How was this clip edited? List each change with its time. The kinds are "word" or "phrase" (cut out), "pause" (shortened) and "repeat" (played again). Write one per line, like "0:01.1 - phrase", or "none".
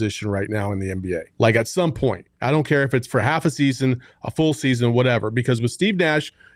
0:01.3 - pause
0:02.3 - pause